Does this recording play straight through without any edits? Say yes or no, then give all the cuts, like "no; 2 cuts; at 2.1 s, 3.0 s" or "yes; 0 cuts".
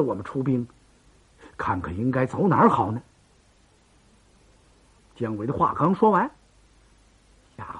yes; 0 cuts